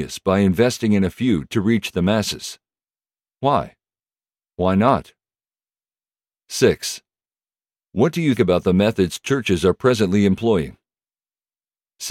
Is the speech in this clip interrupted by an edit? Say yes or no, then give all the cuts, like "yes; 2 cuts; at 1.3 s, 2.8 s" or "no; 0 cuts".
yes; 1 cut; at 8.4 s